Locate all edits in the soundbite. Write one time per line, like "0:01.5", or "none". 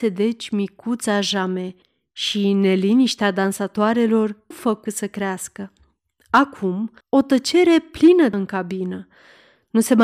0:01.8
0:04.5
0:04.9
0:07.0
0:08.3